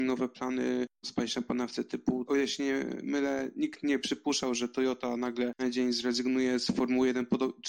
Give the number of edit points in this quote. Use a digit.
3